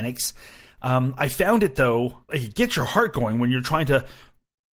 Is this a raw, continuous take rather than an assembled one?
no; 1 cut; at 2.3 s

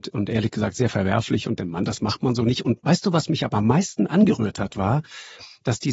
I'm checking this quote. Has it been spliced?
yes; 1 cut; at 1.6 s

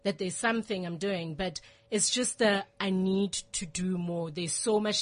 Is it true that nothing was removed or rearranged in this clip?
yes; 0 cuts

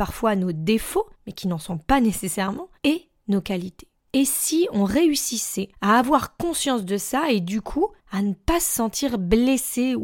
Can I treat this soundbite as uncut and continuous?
no; 5 cuts; at 1.1 s, 2.8 s, 4.0 s, 5.7 s, 8.0 s

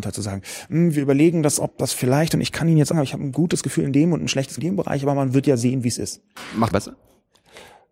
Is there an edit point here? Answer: yes; 3 cuts; at 2.9 s, 4.6 s, 6.7 s

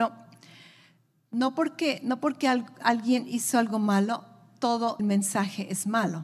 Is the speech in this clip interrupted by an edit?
yes; 1 cut; at 5.0 s

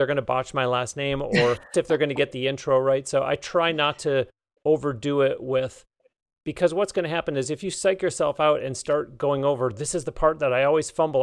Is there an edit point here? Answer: yes; 1 cut; at 1.7 s

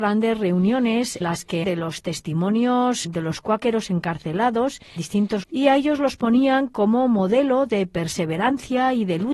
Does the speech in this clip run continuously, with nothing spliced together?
no; 5 cuts; at 1.2 s, 1.6 s, 3.0 s, 5.0 s, 5.4 s

